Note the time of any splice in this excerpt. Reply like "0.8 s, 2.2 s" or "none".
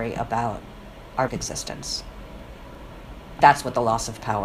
1.3 s, 3.4 s